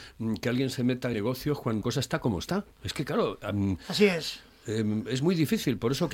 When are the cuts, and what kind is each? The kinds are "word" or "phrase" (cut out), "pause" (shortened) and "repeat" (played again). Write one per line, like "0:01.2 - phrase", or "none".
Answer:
0:01.1 - word
0:01.8 - word
0:02.7 - pause